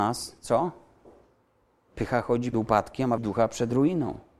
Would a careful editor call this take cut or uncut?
cut